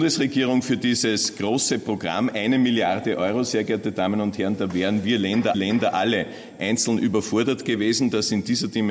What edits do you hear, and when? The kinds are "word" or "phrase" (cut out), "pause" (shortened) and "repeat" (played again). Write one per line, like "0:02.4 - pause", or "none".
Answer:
0:05.5 - repeat